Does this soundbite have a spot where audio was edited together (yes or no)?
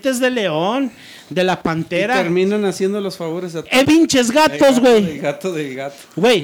yes